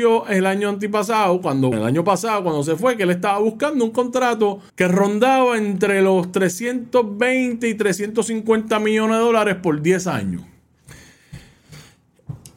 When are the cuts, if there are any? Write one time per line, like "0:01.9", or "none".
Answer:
0:01.7
0:04.7